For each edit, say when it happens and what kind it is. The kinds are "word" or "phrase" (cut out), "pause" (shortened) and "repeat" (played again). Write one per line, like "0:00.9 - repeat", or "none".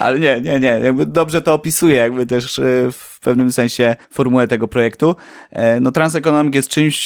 0:04.0 - pause